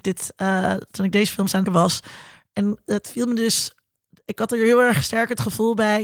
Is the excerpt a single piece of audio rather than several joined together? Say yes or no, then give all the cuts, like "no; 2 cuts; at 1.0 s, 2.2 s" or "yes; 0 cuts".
no; 1 cut; at 1.7 s